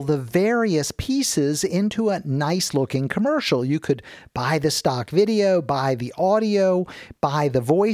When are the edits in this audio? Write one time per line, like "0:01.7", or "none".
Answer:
none